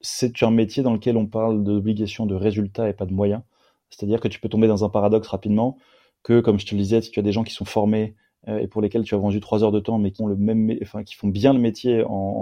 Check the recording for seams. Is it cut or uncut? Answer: cut